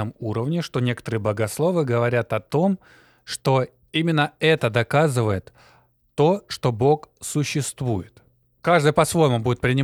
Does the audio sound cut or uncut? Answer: uncut